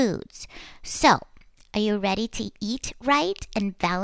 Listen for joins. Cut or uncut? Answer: uncut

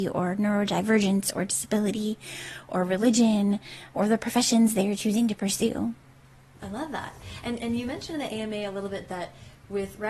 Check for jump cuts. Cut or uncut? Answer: uncut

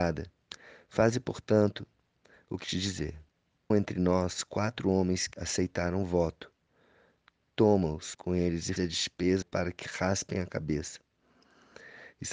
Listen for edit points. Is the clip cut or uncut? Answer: cut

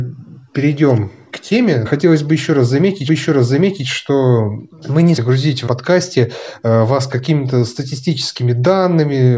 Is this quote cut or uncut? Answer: cut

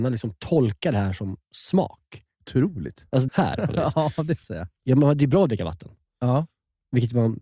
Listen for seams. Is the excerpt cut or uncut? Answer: cut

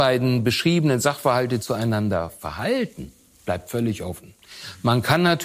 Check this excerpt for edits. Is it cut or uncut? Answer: uncut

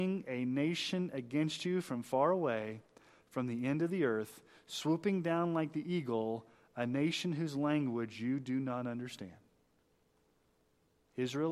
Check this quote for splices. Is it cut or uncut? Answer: uncut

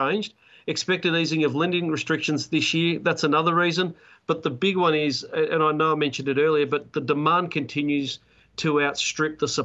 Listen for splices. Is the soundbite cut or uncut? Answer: uncut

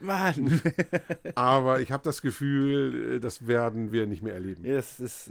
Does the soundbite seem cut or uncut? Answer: uncut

